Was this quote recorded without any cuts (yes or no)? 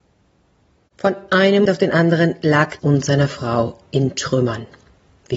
no